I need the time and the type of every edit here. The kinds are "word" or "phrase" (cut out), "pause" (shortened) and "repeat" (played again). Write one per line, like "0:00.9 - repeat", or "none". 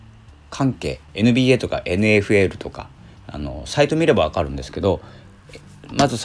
0:01.1 - pause
0:03.2 - pause